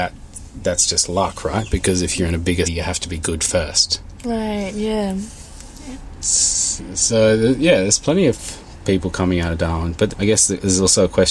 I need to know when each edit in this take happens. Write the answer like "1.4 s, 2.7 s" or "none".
2.6 s, 10.1 s